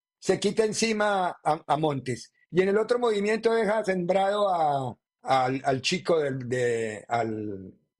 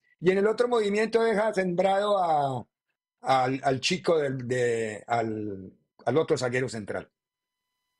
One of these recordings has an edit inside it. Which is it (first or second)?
first